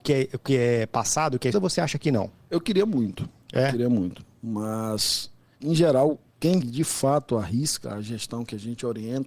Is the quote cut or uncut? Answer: cut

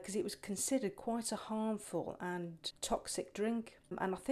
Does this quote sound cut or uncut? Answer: uncut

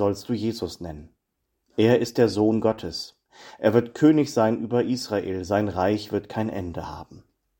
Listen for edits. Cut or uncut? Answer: uncut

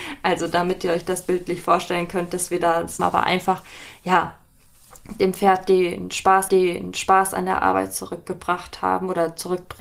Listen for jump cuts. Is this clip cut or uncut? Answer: cut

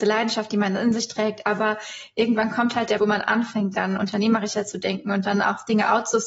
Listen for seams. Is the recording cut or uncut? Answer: cut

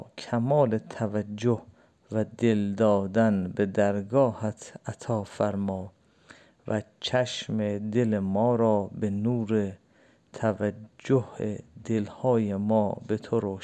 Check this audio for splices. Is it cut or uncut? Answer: uncut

